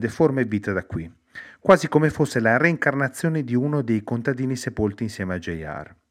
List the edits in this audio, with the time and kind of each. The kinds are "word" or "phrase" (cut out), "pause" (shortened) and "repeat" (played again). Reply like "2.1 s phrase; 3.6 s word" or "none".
none